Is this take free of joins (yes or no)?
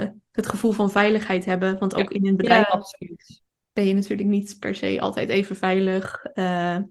yes